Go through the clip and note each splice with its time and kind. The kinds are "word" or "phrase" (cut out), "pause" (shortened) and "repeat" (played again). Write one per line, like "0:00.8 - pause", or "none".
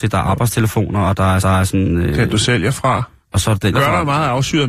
0:01.4 - repeat
0:03.7 - phrase